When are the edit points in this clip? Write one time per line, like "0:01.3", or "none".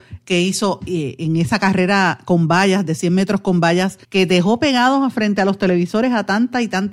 0:04.0